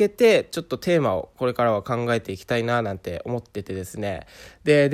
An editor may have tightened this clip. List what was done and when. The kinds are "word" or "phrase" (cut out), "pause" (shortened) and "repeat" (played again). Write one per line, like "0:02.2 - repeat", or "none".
0:01.3 - pause